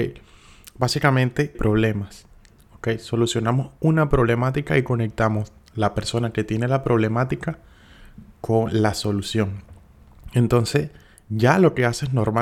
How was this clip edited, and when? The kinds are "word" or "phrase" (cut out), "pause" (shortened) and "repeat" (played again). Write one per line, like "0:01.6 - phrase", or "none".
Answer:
0:01.5 - phrase